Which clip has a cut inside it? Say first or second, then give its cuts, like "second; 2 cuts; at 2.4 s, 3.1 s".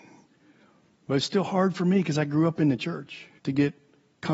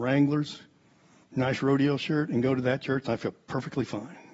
first; 1 cut; at 3.4 s